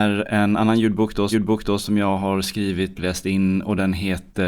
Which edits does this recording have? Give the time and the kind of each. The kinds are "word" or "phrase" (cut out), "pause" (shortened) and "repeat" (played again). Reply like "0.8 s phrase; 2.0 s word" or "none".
1.3 s repeat; 2.9 s word